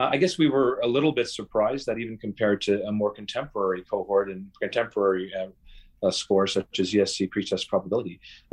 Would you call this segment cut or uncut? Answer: uncut